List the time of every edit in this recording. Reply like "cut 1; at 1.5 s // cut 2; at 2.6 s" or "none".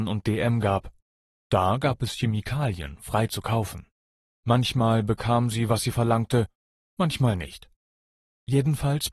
none

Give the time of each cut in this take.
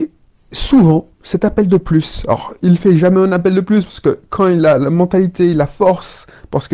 cut 1; at 1.1 s

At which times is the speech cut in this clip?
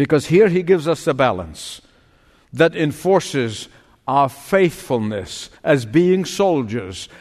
cut 1; at 5.6 s

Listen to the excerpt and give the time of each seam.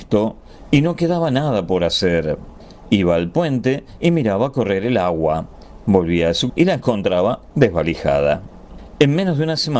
cut 1; at 6.5 s

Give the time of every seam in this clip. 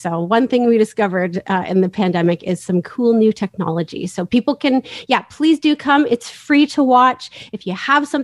none

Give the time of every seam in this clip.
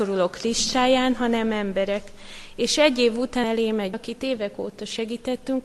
cut 1; at 3.4 s // cut 2; at 3.9 s

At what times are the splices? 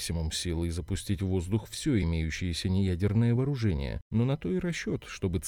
none

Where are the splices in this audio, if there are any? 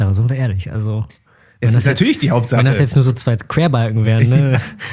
none

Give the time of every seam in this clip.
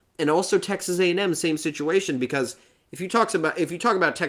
none

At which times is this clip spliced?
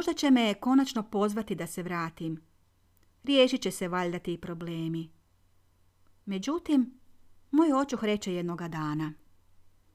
none

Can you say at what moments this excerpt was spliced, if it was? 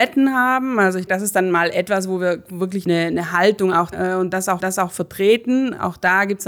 cut 1; at 1.1 s // cut 2; at 2.9 s // cut 3; at 3.9 s // cut 4; at 4.6 s

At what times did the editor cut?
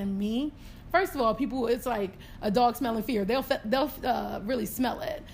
none

